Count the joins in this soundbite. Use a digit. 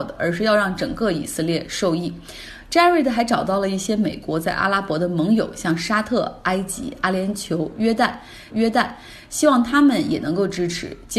1